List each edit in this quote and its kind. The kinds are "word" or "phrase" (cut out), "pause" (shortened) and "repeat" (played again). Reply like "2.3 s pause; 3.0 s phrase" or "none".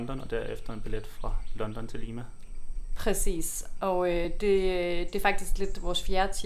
none